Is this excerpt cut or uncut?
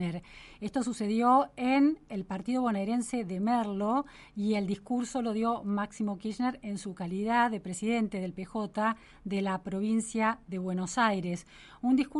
uncut